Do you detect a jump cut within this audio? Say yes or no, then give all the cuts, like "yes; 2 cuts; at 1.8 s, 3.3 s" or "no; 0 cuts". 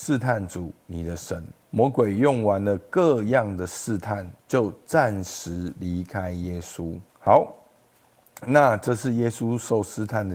yes; 3 cuts; at 1.6 s, 4.4 s, 7.1 s